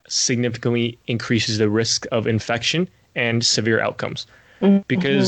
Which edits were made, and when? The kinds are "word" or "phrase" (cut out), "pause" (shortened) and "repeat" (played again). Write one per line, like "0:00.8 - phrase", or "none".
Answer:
none

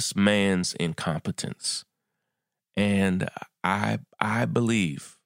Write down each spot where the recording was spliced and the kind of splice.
none

